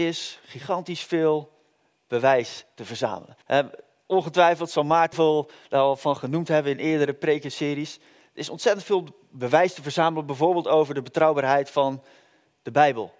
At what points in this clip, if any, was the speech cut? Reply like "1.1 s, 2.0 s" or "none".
3.4 s, 5.1 s